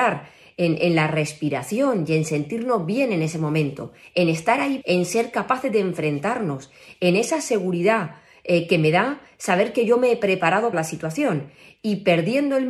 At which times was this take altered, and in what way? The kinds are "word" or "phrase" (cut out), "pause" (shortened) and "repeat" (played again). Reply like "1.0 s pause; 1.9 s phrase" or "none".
4.8 s word; 10.7 s word